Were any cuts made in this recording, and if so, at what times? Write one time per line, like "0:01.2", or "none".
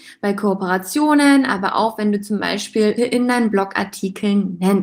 0:03.0